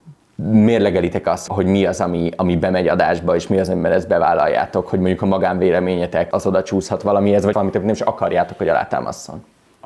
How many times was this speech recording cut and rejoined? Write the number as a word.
three